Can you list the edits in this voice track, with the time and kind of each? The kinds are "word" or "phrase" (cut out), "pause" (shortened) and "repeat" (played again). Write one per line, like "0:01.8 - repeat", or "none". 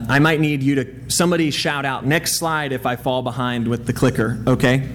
0:02.0 - word